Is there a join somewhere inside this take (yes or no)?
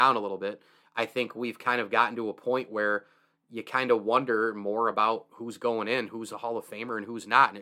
no